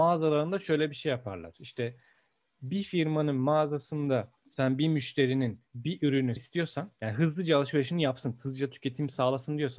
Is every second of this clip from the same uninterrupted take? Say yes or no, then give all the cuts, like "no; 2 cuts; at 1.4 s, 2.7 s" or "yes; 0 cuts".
no; 4 cuts; at 4.4 s, 5.7 s, 6.4 s, 7.0 s